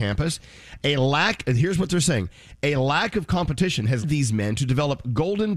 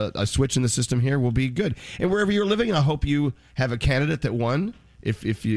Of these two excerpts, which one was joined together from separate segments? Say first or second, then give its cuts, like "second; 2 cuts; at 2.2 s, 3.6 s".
first; 1 cut; at 4.0 s